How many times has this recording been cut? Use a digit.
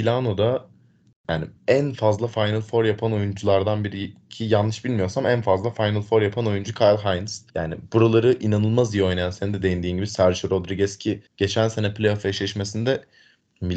3